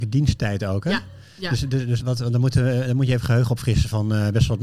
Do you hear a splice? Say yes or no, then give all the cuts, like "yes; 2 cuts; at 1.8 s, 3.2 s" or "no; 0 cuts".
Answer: yes; 1 cut; at 2.0 s